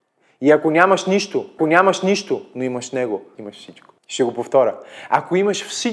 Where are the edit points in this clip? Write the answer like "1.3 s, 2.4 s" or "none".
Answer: 1.6 s, 3.4 s, 4.0 s